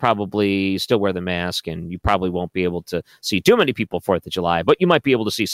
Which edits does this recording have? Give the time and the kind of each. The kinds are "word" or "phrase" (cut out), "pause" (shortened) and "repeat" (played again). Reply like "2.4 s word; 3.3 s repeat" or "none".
none